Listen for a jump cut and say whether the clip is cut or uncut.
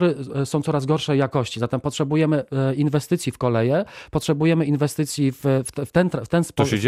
uncut